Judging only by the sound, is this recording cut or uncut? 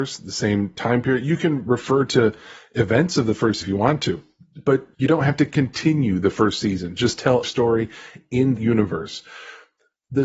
cut